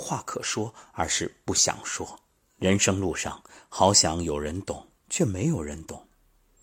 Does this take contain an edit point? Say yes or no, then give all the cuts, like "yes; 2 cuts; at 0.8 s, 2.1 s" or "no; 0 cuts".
yes; 2 cuts; at 2.4 s, 5.0 s